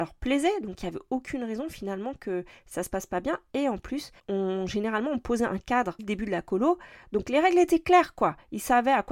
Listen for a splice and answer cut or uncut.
cut